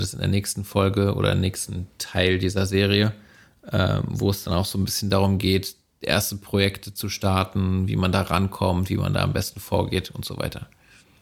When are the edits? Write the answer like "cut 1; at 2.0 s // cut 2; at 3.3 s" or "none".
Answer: none